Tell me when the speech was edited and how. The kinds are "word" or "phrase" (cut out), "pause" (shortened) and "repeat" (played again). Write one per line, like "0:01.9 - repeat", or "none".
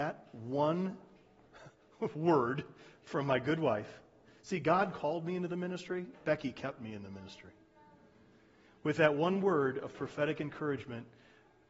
none